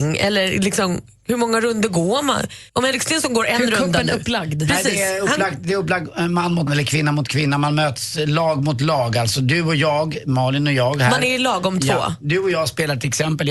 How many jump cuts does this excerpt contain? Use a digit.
2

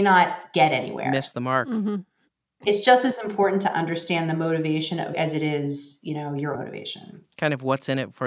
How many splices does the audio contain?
2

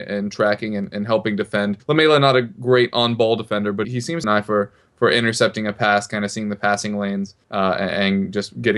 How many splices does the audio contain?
4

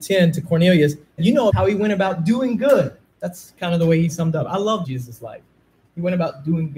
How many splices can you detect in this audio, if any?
4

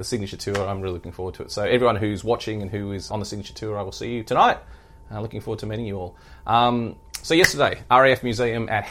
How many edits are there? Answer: 1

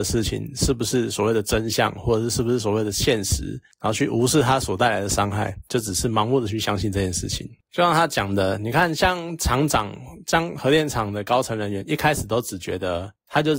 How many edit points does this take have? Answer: 1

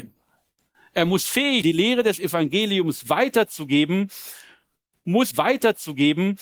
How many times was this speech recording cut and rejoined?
2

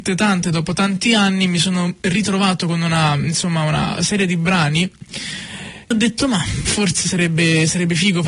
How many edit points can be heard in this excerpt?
1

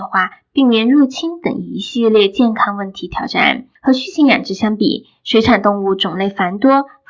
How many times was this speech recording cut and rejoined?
1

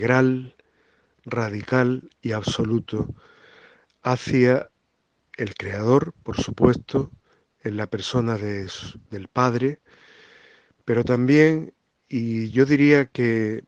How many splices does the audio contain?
0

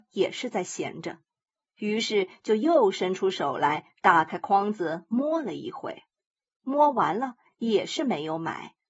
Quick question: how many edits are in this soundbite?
0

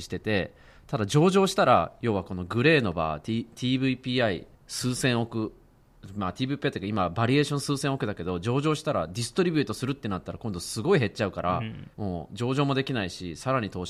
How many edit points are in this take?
2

